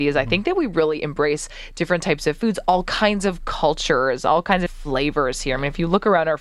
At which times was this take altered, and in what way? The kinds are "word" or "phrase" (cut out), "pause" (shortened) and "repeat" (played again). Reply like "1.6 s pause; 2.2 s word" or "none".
4.7 s phrase